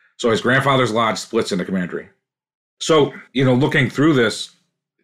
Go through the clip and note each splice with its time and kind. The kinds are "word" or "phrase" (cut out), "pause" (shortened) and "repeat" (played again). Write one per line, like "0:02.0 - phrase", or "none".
0:01.7 - word
0:03.3 - pause